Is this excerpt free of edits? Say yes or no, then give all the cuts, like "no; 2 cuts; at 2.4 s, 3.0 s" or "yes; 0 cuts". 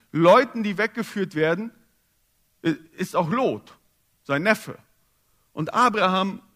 yes; 0 cuts